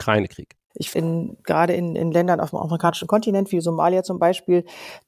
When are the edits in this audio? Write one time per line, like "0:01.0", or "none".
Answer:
0:00.9